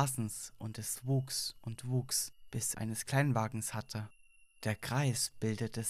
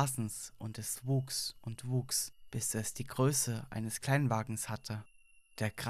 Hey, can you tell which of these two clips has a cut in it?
first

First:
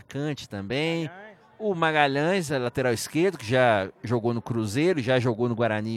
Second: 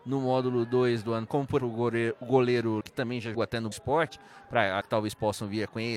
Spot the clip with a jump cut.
second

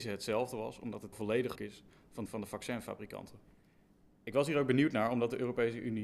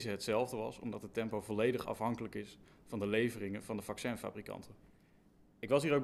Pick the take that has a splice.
first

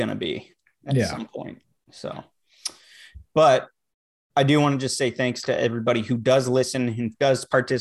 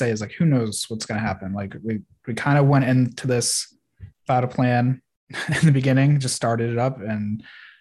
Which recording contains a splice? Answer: second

